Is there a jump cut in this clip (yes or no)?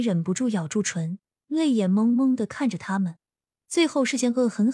no